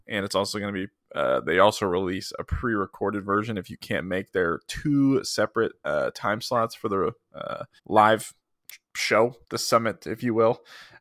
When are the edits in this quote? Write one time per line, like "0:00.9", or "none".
0:07.8
0:09.4